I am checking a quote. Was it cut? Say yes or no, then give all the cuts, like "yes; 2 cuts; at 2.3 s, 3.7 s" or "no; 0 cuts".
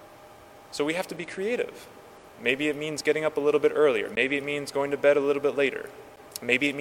no; 0 cuts